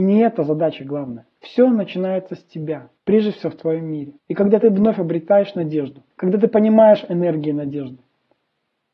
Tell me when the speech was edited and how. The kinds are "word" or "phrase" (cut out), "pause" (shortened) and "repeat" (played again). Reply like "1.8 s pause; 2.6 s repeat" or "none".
1.3 s pause; 3.0 s pause; 4.2 s pause; 6.1 s pause